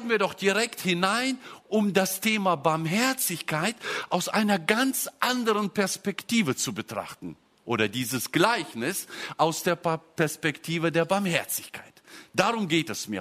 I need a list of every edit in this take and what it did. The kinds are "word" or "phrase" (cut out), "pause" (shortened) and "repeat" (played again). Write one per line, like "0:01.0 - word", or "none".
0:07.6 - pause